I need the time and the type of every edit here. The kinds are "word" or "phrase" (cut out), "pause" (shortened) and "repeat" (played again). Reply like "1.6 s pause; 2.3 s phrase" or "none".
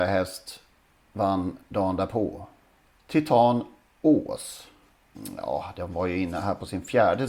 none